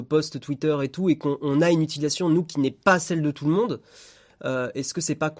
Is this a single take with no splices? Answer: yes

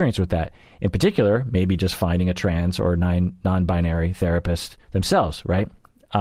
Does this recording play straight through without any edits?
no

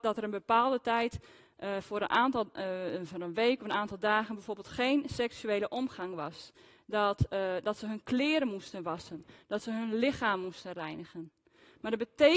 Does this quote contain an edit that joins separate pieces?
no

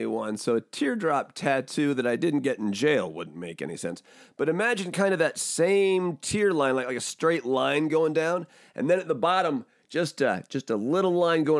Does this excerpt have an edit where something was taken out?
no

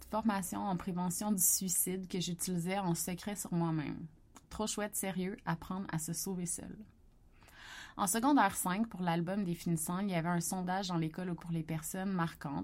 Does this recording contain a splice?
yes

